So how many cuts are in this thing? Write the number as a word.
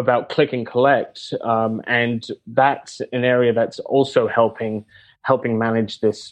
zero